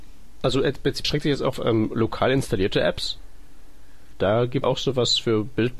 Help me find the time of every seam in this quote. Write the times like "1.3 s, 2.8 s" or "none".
1.0 s, 1.5 s, 4.1 s, 4.6 s